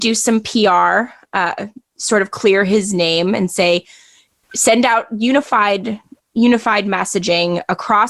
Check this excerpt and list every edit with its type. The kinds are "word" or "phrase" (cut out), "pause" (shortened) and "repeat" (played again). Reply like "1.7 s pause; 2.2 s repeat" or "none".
none